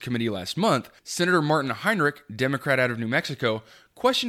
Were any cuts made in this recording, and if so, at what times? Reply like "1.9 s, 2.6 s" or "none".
1.0 s